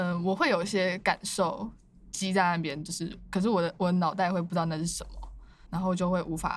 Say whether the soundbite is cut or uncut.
cut